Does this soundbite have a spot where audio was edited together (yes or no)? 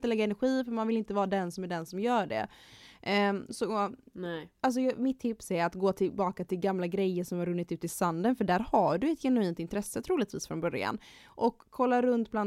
no